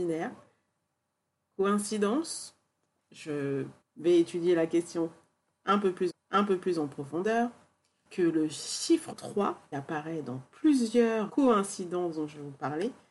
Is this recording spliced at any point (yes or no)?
yes